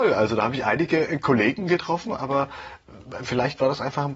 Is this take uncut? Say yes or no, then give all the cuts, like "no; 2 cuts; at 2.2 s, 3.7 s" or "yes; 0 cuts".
yes; 0 cuts